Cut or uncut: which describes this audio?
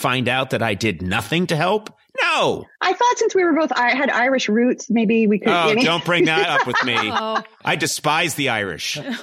cut